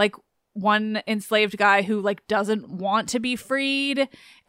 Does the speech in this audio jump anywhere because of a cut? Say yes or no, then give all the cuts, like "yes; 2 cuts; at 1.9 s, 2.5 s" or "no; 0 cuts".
no; 0 cuts